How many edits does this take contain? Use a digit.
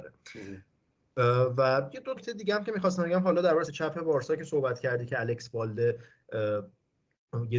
2